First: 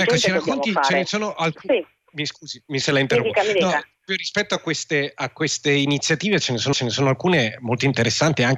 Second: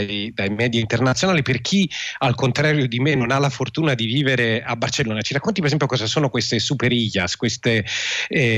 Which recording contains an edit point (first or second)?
first